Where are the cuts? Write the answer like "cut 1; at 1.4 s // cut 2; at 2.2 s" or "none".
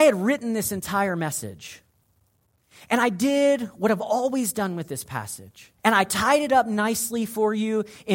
cut 1; at 5.8 s